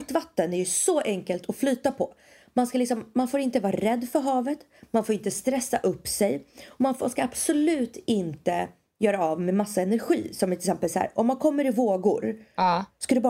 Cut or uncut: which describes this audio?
uncut